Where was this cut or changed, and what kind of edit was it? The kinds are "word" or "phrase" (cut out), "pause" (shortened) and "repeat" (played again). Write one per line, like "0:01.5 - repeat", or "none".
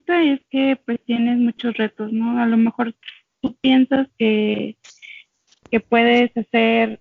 none